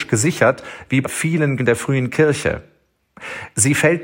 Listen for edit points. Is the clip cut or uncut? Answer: cut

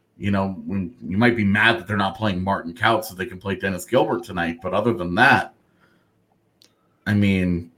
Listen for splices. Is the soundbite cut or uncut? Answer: uncut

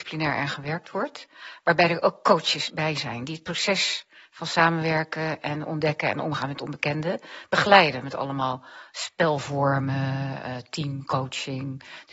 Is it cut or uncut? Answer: uncut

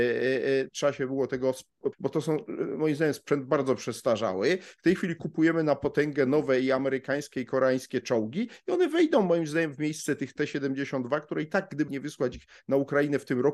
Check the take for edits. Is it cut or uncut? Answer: cut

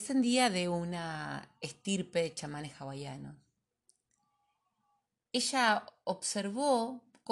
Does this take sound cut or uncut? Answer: uncut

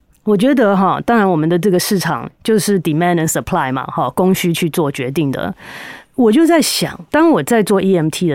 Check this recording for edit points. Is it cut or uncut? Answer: cut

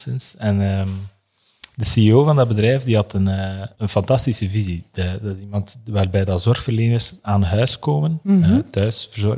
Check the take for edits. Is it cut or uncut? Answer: cut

